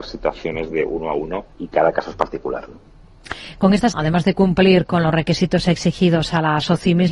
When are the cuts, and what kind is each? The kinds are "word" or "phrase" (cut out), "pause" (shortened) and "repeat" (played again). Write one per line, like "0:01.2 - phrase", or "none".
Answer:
0:01.5 - pause
0:03.9 - phrase